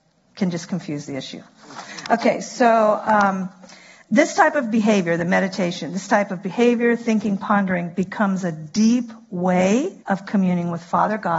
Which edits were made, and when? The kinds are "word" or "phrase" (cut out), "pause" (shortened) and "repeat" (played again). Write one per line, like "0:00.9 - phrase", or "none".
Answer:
0:10.0 - pause